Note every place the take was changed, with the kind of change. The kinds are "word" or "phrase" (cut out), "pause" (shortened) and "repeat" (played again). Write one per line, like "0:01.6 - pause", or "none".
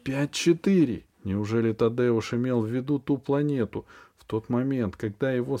0:01.1 - pause